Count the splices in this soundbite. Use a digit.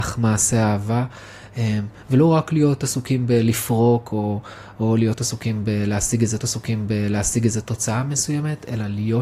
1